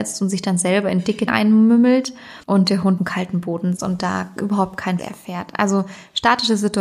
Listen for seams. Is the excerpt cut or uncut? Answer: cut